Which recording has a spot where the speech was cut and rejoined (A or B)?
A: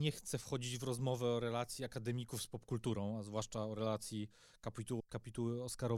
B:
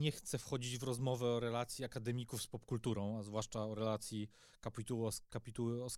A